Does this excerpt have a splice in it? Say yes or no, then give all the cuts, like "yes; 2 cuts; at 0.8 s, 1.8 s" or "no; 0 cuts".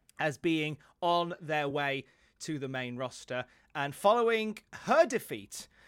no; 0 cuts